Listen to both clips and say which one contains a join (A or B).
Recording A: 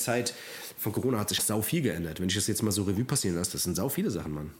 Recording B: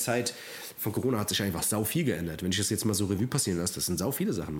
A